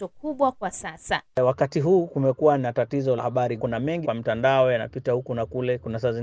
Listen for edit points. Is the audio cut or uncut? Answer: cut